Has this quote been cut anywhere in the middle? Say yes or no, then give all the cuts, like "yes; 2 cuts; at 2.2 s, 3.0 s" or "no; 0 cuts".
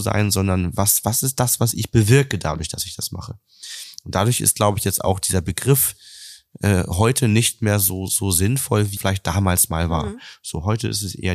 yes; 1 cut; at 9.0 s